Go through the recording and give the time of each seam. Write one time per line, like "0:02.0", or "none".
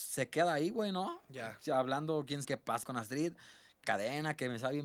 0:02.4
0:02.8
0:03.8